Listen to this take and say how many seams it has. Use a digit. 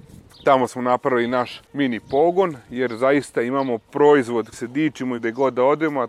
3